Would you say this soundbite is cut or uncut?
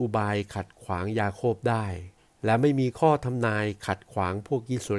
cut